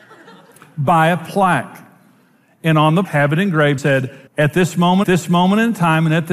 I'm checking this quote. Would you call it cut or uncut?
cut